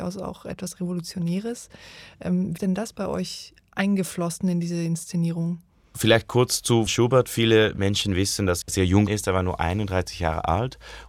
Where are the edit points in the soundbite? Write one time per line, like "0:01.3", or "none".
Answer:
0:02.6
0:06.9
0:08.6
0:09.1